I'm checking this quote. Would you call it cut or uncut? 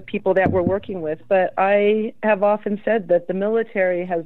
uncut